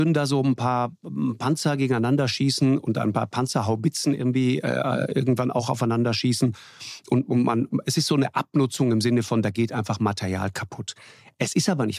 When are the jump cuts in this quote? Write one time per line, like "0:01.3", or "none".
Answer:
none